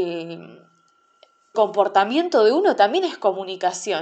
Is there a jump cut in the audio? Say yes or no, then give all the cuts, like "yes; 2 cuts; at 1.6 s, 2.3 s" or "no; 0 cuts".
yes; 1 cut; at 1.5 s